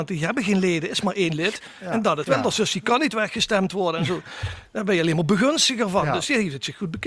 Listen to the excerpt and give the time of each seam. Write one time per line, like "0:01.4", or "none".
0:02.2